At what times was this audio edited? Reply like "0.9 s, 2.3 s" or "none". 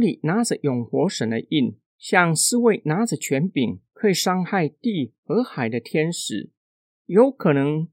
none